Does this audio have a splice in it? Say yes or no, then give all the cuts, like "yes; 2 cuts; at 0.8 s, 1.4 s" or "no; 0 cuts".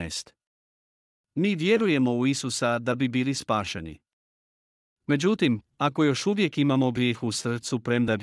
no; 0 cuts